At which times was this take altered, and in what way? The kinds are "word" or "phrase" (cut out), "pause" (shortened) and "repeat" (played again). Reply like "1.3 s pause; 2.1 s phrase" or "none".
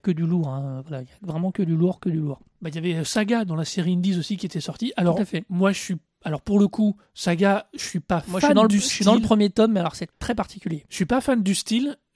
2.5 s pause; 7.0 s pause; 10.1 s pause